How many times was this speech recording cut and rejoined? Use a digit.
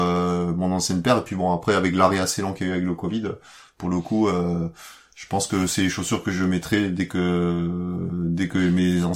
0